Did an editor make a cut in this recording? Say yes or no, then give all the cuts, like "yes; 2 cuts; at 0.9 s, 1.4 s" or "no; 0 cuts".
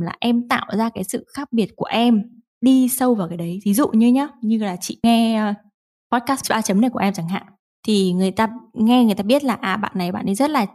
no; 0 cuts